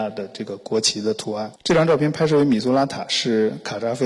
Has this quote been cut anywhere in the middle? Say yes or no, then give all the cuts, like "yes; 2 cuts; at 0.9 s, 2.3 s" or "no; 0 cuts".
yes; 1 cut; at 1.6 s